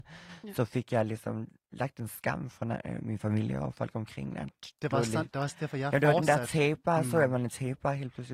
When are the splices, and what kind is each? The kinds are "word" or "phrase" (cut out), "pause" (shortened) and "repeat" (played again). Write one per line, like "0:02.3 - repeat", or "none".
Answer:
none